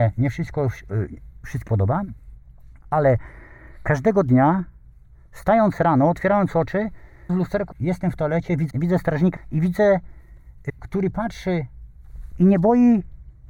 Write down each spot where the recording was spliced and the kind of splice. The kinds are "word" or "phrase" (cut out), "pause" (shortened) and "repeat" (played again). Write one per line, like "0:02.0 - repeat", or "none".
0:01.7 - word
0:07.3 - word
0:07.7 - word
0:08.7 - word
0:09.4 - word
0:10.7 - word